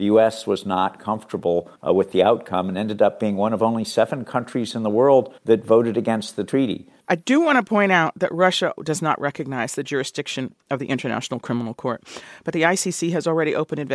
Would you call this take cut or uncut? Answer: cut